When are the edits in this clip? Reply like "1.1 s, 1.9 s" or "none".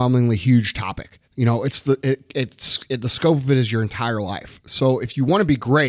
1.2 s